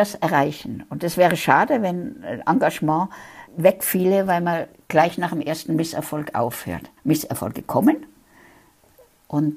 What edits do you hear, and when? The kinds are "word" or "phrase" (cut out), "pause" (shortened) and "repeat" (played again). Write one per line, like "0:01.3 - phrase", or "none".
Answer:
0:03.5 - pause
0:07.0 - pause